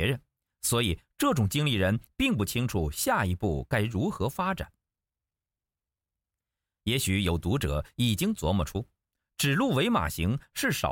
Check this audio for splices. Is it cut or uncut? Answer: uncut